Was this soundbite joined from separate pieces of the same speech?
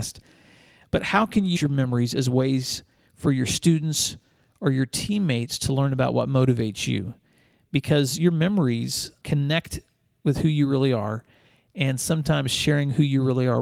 yes; 2 cuts; at 1.6 s, 9.2 s

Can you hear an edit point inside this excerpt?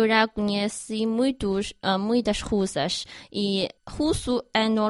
yes; 1 cut; at 3.8 s

